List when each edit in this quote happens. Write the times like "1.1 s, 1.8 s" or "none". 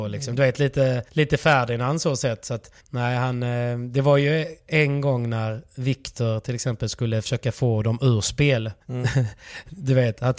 1.1 s, 2.8 s, 8.8 s